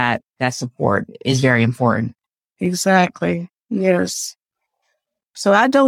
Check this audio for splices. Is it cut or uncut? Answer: uncut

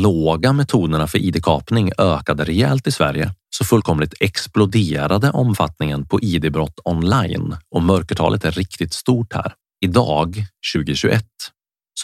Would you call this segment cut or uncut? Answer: cut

